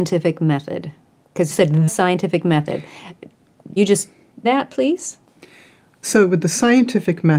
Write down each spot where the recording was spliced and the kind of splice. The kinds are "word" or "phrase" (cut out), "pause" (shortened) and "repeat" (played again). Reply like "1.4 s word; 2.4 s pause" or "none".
1.5 s word; 1.9 s word; 3.8 s word; 4.4 s word